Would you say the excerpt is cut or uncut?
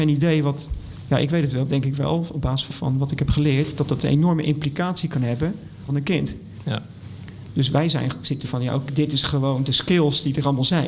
cut